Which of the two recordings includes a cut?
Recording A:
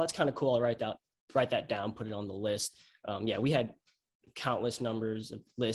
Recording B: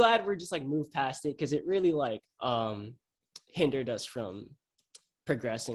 B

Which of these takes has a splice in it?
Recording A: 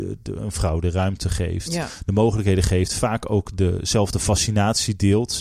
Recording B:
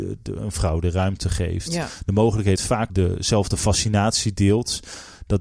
B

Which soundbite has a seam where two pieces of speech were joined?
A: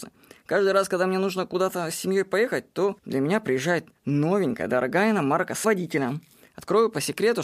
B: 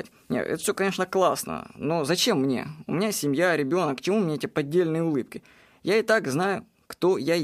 A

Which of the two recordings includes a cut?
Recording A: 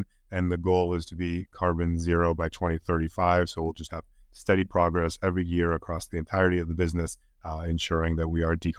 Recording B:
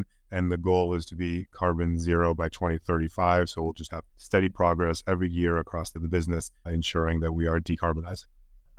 B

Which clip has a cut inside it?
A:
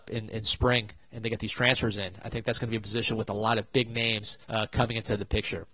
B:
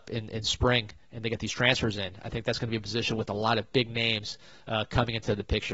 A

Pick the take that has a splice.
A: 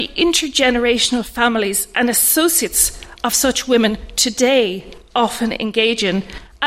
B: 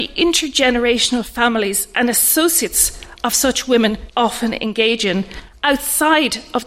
B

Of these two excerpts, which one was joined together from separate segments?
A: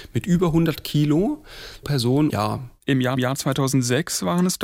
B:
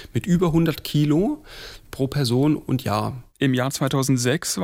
A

